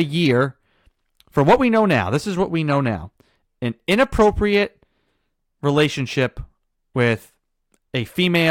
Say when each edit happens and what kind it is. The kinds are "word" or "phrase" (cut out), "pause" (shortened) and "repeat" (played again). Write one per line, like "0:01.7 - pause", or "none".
none